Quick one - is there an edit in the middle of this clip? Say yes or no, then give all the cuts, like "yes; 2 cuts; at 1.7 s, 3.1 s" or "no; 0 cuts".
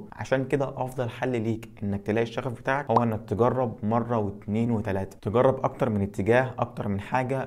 no; 0 cuts